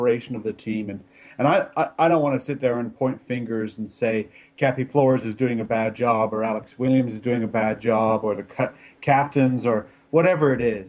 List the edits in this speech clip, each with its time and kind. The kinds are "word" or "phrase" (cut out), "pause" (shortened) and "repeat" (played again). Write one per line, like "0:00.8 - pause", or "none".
none